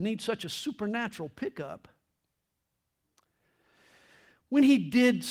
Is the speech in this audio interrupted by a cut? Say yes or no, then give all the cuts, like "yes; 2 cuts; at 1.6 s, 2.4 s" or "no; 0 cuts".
no; 0 cuts